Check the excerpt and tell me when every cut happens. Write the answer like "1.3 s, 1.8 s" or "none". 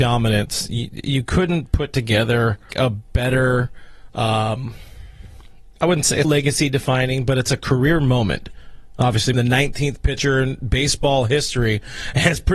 2.7 s, 5.8 s, 6.2 s, 9.3 s